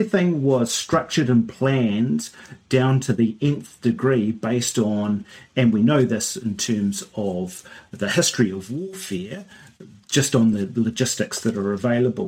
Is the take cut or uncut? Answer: uncut